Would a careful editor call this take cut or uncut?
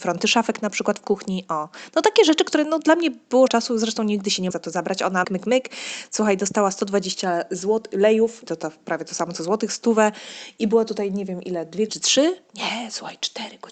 cut